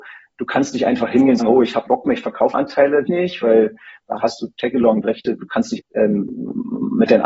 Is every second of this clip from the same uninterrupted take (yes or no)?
no